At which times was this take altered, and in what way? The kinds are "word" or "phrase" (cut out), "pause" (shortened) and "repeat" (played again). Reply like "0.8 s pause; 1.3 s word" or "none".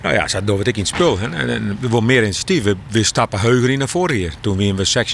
none